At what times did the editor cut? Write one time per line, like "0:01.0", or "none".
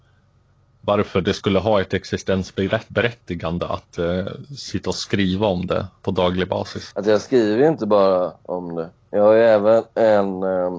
0:06.0